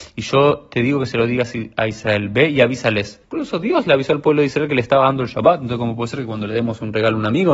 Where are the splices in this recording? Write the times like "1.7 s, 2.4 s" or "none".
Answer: 3.2 s